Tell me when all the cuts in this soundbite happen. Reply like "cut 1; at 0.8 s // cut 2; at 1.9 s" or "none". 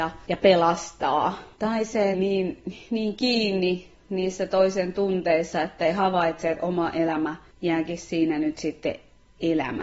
cut 1; at 1.5 s // cut 2; at 2.1 s